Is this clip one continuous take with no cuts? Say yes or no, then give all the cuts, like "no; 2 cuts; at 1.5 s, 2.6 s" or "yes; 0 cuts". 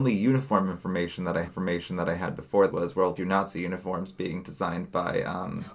no; 3 cuts; at 1.4 s, 2.7 s, 3.2 s